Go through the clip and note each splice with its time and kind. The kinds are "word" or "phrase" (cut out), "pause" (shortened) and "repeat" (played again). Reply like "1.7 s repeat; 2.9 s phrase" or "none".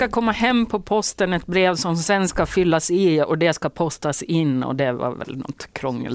none